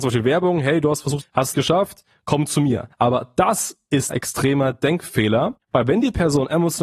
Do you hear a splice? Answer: yes; 5 cuts; at 1.2 s, 1.5 s, 2.9 s, 4.1 s, 5.6 s

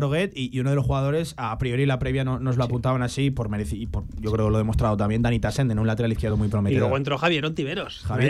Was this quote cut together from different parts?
no; 0 cuts

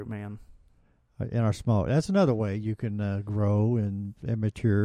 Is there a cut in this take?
no; 0 cuts

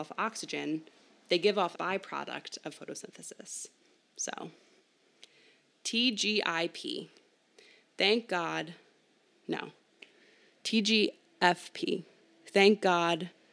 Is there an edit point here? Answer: yes; 1 cut; at 1.7 s

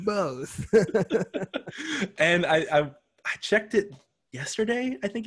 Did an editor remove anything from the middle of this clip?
no; 0 cuts

